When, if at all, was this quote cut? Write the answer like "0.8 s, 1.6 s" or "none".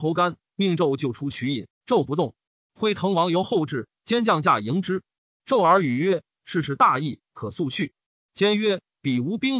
none

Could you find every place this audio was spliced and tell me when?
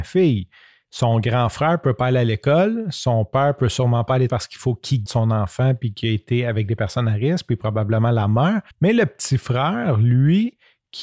4.3 s, 5.1 s, 8.7 s

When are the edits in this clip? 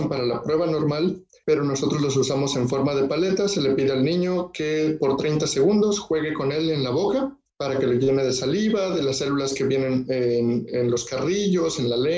none

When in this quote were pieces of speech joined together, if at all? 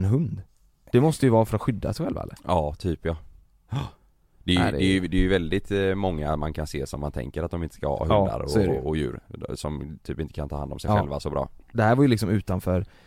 none

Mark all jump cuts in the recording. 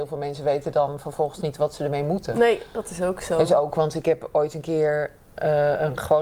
none

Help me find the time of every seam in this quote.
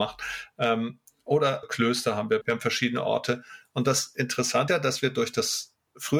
1.6 s, 2.4 s, 4.7 s

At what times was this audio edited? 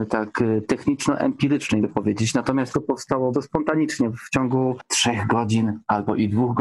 1.8 s, 2.7 s, 3.3 s

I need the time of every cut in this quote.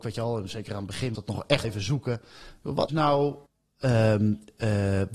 1.1 s, 1.6 s, 2.9 s, 3.5 s

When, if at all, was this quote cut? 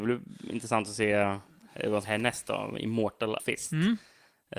2.0 s, 3.4 s

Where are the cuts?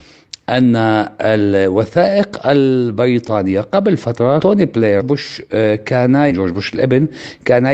4.4 s, 5.0 s, 6.3 s

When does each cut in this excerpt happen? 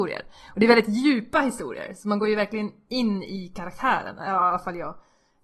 none

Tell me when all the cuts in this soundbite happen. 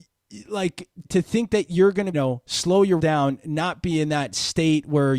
1.0 s, 2.1 s, 3.0 s

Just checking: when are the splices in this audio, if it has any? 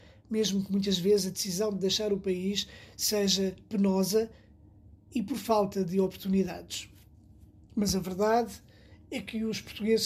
none

